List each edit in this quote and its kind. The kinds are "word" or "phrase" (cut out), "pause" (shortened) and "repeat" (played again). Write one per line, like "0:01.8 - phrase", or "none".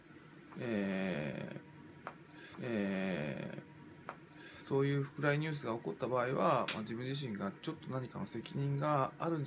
0:02.5 - repeat